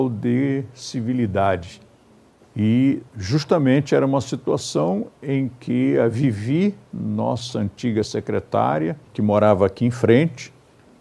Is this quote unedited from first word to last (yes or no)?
no